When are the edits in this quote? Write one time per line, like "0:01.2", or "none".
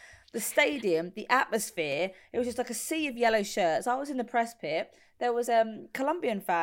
none